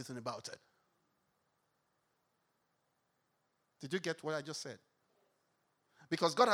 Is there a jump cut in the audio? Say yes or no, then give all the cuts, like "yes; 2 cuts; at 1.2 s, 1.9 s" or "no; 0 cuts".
no; 0 cuts